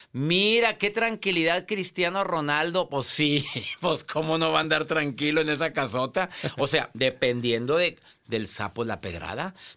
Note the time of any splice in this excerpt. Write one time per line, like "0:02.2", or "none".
none